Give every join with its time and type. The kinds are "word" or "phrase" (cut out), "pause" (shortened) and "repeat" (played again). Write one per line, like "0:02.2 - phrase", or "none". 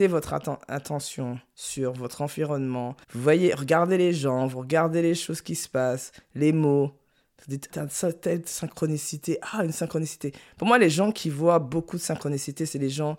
0:03.0 - pause
0:07.7 - word